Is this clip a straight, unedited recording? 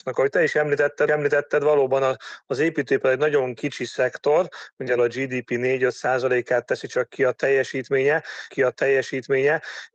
no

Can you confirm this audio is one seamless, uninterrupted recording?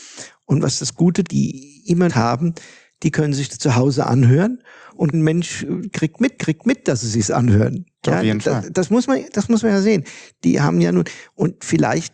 no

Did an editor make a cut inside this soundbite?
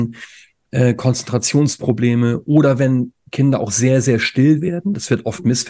no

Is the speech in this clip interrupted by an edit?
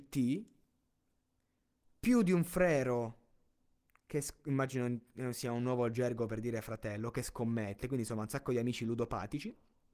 no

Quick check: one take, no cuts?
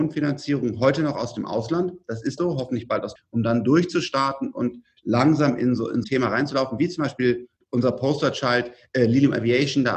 no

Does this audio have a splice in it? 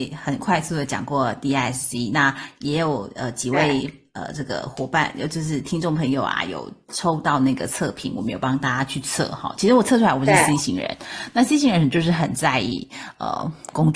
no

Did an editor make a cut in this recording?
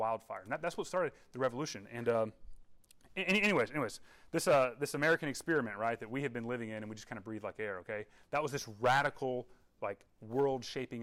no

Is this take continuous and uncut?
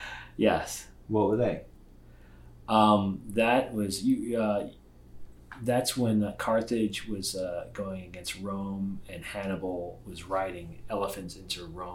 yes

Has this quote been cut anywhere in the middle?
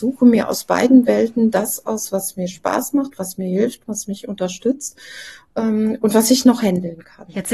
no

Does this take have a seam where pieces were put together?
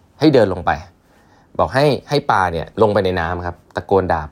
yes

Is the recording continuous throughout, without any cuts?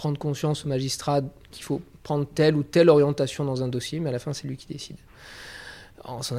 yes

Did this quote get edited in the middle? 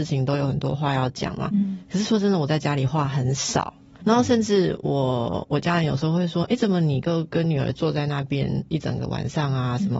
yes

